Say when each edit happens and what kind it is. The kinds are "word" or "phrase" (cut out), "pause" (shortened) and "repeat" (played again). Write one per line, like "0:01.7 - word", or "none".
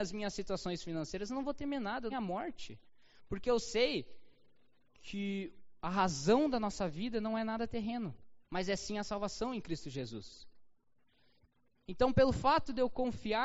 0:02.1 - phrase
0:05.8 - pause
0:08.4 - pause